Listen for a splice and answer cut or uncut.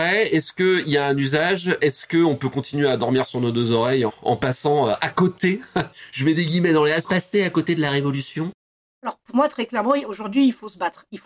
cut